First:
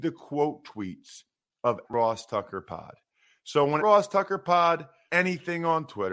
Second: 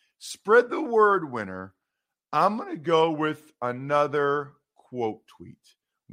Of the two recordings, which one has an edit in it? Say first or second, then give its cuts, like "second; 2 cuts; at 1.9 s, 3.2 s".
first; 3 cuts; at 1.8 s, 3.8 s, 5.1 s